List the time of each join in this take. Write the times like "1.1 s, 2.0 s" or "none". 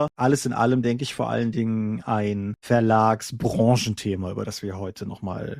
none